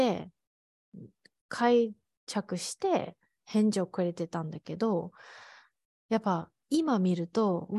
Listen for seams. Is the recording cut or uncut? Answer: uncut